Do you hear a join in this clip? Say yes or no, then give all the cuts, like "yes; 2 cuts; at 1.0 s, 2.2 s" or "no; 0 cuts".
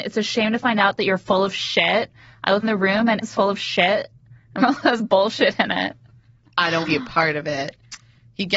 yes; 5 cuts; at 2.6 s, 3.2 s, 4.6 s, 5.0 s, 6.8 s